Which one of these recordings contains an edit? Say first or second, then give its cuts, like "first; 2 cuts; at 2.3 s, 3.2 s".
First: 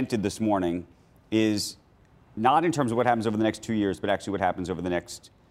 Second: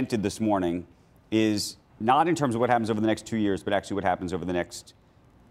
second; 1 cut; at 1.9 s